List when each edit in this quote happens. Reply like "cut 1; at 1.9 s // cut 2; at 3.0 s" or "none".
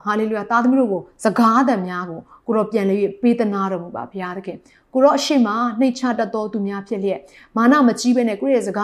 none